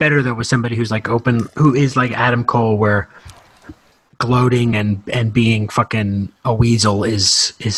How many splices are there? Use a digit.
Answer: 0